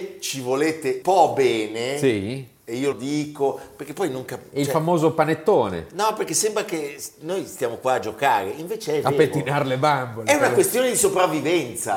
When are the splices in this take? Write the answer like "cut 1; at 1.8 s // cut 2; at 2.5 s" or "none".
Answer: cut 1; at 1.0 s // cut 2; at 2.9 s